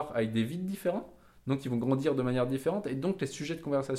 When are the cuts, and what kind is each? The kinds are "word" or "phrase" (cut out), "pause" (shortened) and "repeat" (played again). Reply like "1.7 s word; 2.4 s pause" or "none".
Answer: none